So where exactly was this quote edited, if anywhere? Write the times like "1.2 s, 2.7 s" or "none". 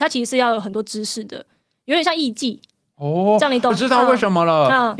3.7 s